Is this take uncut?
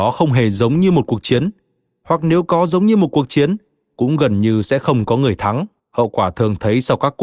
no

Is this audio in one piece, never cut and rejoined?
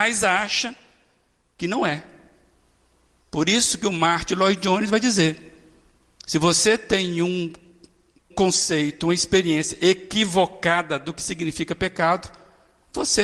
no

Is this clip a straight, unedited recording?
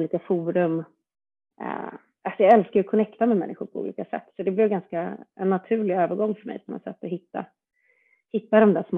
yes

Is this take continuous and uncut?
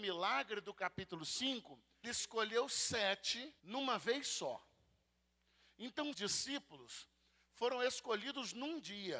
no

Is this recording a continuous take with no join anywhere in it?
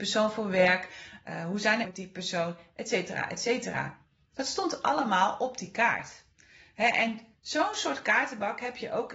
no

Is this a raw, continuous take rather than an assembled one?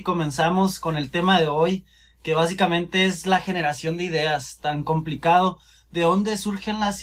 yes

